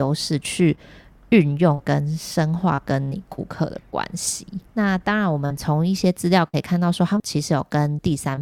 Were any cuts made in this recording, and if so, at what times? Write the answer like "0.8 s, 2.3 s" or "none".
4.7 s